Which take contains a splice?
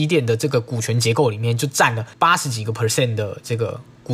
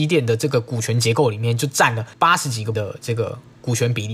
second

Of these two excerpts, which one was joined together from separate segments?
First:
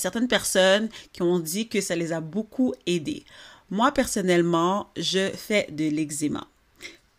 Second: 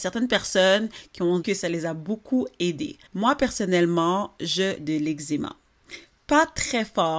second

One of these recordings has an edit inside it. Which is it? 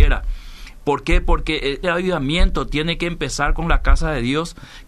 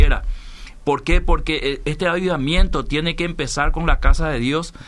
first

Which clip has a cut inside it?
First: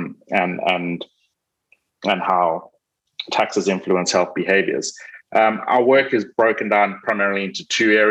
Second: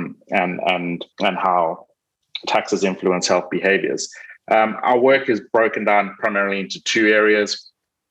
second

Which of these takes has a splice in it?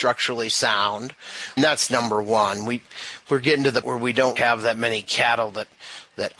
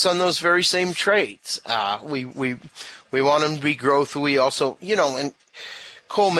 first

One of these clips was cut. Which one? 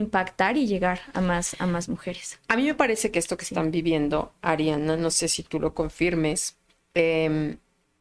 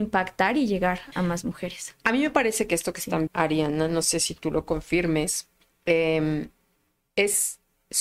second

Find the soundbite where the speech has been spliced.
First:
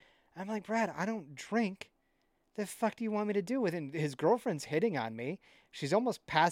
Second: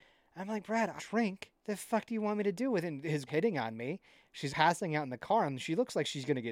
second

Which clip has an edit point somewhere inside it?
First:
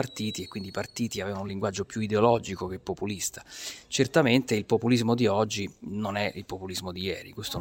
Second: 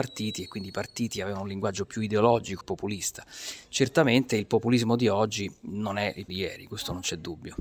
second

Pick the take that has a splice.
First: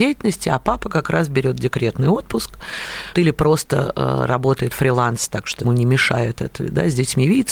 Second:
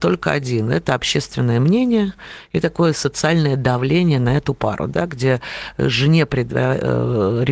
first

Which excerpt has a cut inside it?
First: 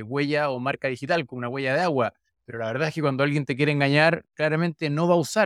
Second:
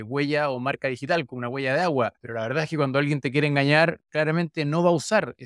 second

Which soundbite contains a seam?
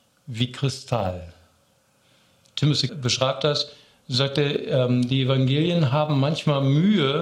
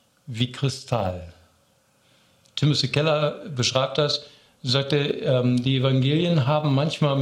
first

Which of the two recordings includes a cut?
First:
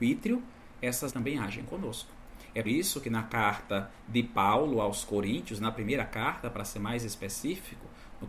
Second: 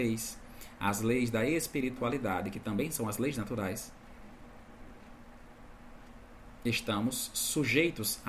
first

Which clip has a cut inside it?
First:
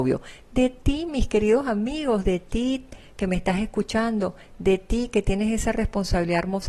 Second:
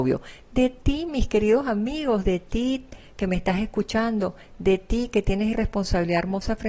second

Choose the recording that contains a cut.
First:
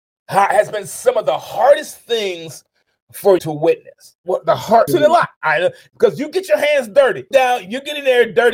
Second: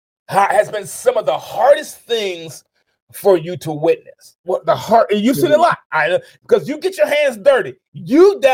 first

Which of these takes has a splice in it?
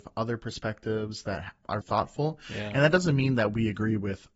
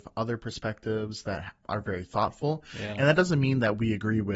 first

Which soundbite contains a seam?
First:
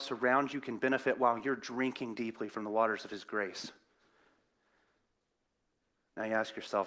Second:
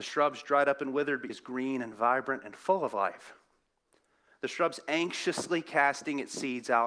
second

